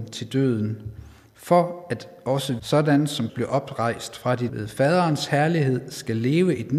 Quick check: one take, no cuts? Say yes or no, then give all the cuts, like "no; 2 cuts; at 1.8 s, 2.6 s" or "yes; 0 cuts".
no; 3 cuts; at 2.6 s, 3.3 s, 4.5 s